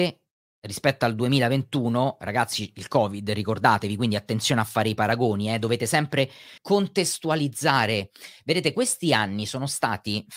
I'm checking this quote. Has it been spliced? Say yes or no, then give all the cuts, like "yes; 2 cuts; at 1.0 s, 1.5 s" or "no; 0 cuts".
yes; 1 cut; at 6.6 s